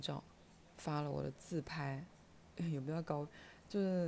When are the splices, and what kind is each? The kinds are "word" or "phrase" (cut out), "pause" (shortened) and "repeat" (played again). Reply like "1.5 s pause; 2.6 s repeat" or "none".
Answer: 2.6 s word